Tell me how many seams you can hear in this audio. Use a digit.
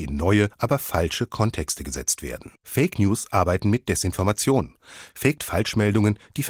2